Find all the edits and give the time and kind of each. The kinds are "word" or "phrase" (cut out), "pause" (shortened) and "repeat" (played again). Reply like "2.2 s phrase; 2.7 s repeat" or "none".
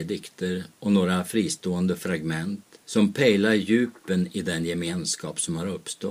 2.8 s pause